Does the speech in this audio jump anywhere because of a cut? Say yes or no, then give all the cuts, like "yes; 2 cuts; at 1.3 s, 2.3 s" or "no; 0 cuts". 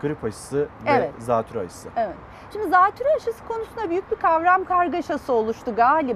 no; 0 cuts